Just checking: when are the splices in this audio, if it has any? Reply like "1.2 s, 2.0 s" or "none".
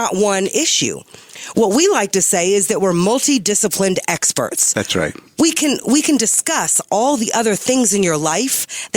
none